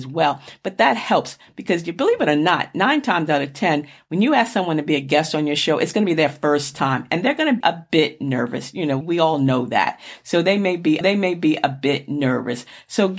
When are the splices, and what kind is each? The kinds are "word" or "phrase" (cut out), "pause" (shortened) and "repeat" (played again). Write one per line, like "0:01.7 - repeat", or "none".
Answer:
0:07.6 - word
0:09.0 - word
0:11.0 - repeat

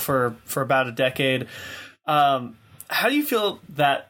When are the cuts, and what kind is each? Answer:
none

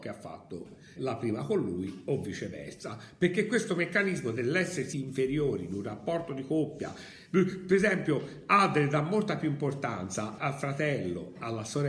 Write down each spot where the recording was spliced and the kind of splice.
0:01.0 - word
0:04.9 - word
0:10.4 - word

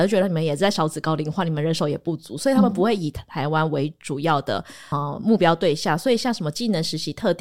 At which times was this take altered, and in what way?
0:04.9 - word

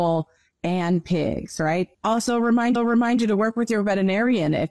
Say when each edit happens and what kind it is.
0:01.9 - pause
0:02.8 - repeat

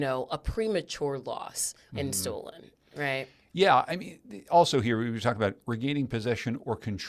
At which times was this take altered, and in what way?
none

